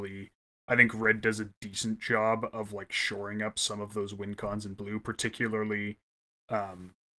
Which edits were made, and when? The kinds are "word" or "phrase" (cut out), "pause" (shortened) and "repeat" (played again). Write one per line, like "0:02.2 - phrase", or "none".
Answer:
none